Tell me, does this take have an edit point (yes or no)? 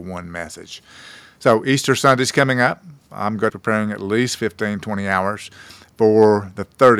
yes